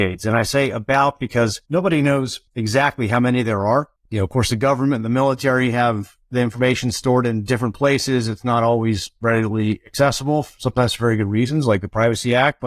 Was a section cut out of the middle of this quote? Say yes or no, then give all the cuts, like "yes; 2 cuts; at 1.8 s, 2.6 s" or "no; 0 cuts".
yes; 3 cuts; at 1.7 s, 2.5 s, 4.0 s